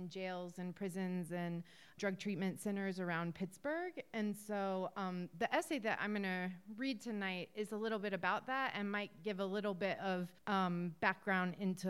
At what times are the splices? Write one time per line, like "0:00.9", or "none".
0:02.0
0:10.4